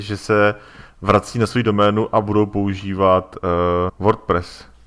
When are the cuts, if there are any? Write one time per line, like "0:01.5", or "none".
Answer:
0:03.9